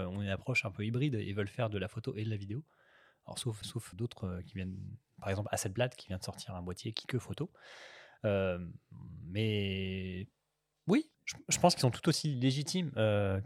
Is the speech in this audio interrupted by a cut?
yes; 3 cuts; at 3.6 s, 3.9 s, 7.0 s

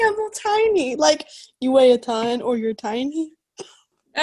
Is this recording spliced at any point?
no; 0 cuts

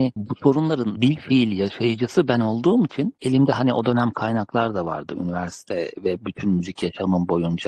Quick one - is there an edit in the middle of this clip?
no; 0 cuts

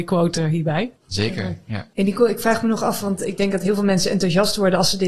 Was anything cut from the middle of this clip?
yes; 2 cuts; at 1.0 s, 1.9 s

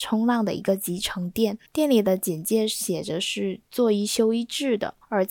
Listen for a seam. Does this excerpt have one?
yes; 1 cut; at 1.7 s

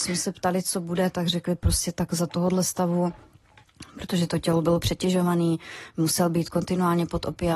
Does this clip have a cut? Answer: no; 0 cuts

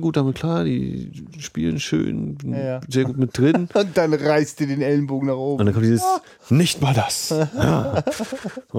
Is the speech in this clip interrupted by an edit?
no; 0 cuts

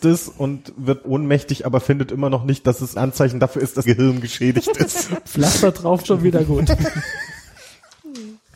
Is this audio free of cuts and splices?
no; 4 cuts; at 1.0 s, 3.0 s, 3.8 s, 6.0 s

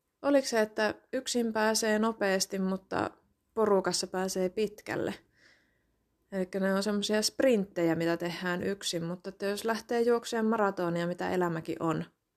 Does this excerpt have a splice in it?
no; 0 cuts

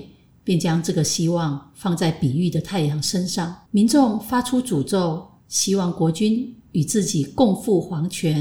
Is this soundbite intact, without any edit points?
no; 2 cuts; at 3.7 s, 5.4 s

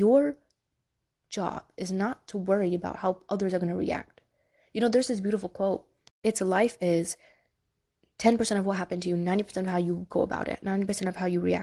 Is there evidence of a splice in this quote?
no; 0 cuts

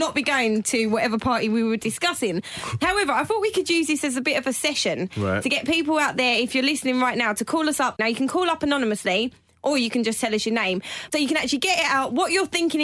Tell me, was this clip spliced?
no; 0 cuts

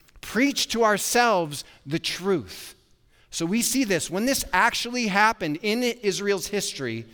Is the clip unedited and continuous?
yes; 0 cuts

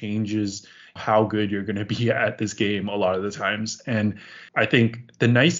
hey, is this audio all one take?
no; 2 cuts; at 1.0 s, 4.5 s

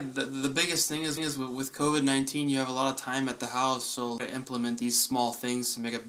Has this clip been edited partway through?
yes; 2 cuts; at 1.2 s, 4.2 s

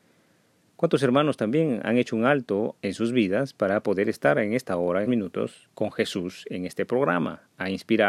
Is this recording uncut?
no; 3 cuts; at 2.8 s, 5.0 s, 5.7 s

